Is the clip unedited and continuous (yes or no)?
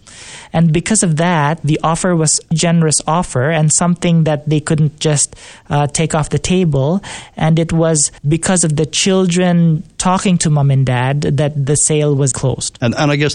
no